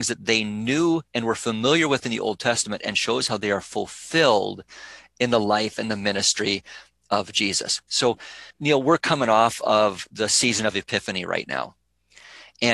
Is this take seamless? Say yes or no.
no